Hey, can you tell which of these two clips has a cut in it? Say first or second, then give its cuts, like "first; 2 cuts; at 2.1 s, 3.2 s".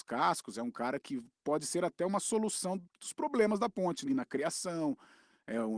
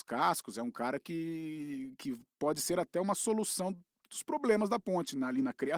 first; 3 cuts; at 1.0 s, 2.9 s, 4.1 s